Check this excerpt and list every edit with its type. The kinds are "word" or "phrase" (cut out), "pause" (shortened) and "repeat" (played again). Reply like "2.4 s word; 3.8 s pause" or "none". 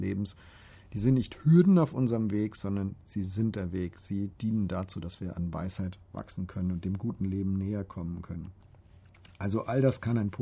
none

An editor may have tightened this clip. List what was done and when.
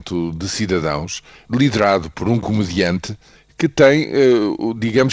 none

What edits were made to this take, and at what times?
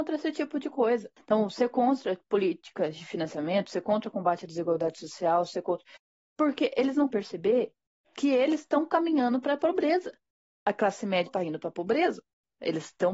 1.2 s pause; 7.1 s word; 11.3 s word

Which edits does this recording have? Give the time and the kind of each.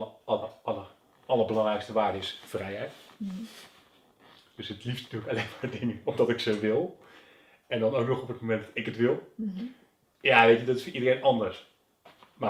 none

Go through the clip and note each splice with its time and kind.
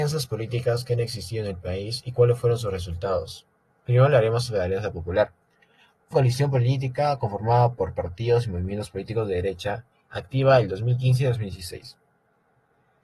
6.1 s word

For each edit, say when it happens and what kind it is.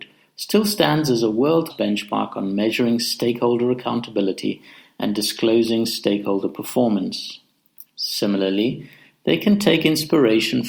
1.7 s word

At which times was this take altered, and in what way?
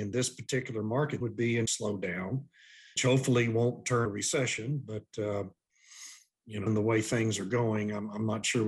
1.2 s word; 1.7 s word; 3.0 s word; 4.1 s word; 6.7 s word

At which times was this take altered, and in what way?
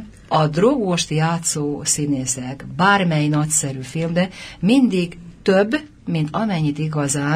none

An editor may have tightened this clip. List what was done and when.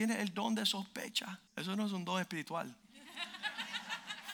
1.5 s pause

